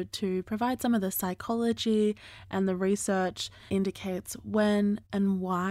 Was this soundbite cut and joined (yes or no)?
yes